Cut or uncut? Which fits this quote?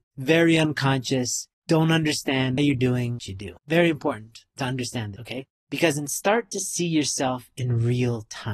cut